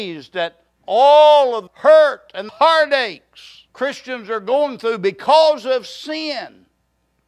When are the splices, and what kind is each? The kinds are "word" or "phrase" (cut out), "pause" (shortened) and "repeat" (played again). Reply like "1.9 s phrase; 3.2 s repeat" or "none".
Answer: 1.7 s word; 2.5 s word; 3.7 s pause